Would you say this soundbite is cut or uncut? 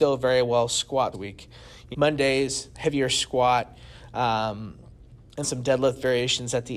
cut